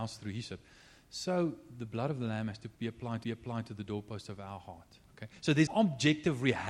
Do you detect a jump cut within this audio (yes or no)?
yes